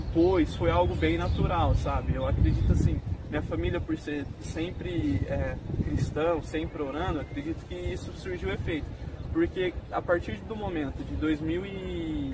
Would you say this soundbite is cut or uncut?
uncut